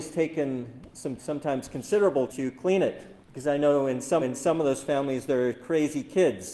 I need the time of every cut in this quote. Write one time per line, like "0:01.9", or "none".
0:01.2
0:02.3
0:03.2
0:04.2